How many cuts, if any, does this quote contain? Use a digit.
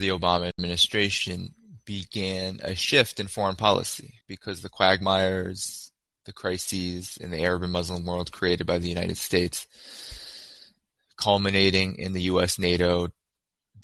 1